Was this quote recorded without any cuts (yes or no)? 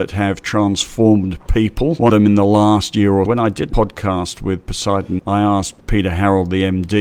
no